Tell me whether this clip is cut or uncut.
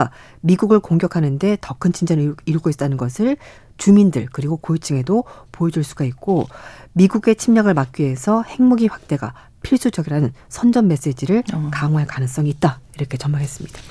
uncut